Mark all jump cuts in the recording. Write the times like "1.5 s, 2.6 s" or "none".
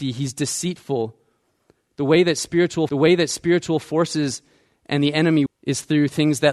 2.9 s, 5.5 s

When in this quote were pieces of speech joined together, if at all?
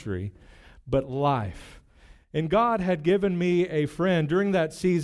none

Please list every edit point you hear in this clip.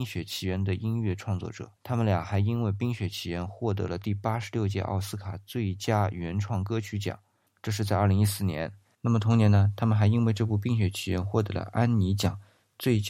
1.8 s

